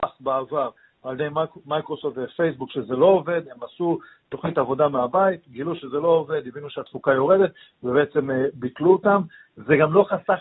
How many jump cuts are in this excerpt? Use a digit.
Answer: 0